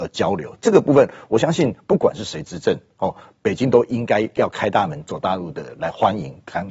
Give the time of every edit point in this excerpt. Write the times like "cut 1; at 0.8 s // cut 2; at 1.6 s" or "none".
none